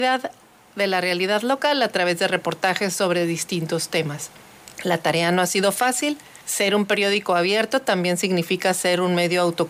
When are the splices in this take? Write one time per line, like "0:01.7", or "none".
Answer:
0:04.7
0:06.4